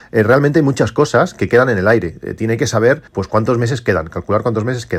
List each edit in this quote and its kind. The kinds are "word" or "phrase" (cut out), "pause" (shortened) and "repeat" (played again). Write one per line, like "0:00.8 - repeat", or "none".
0:03.1 - pause